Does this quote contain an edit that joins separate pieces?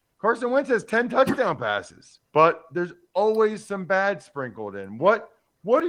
yes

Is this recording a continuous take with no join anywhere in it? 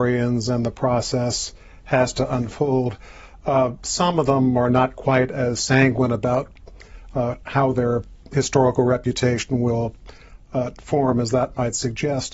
yes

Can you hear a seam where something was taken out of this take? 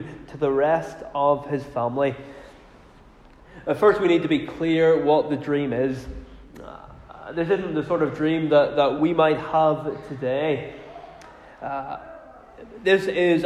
no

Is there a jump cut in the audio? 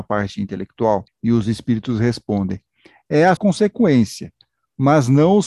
yes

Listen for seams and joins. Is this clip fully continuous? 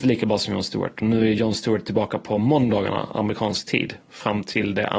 yes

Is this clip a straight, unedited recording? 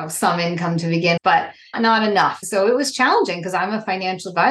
no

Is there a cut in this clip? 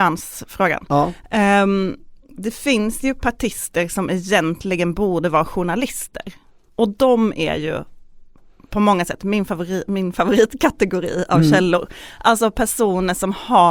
no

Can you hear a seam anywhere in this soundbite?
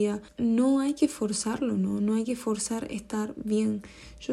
no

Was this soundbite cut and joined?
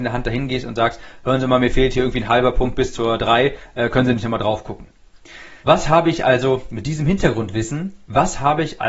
yes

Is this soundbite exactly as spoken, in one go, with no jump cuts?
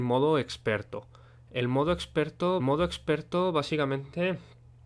no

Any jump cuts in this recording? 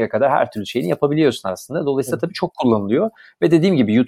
no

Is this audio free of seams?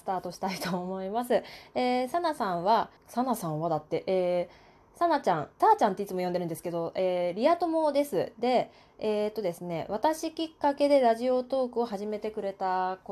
no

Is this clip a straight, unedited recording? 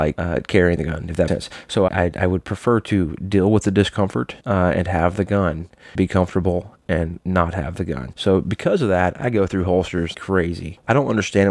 no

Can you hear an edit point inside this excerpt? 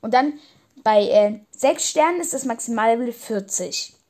yes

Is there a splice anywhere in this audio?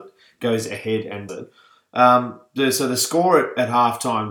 yes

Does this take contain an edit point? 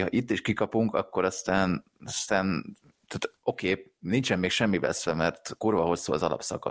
yes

